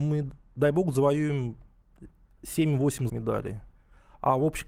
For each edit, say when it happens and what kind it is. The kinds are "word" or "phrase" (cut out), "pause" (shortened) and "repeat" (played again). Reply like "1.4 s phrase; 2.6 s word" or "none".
3.1 s word